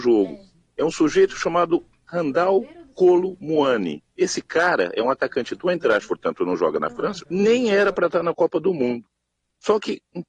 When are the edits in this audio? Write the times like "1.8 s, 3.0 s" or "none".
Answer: 4.1 s, 6.1 s, 7.2 s